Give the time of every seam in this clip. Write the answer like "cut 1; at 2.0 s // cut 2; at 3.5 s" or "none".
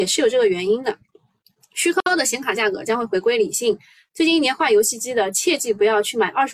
none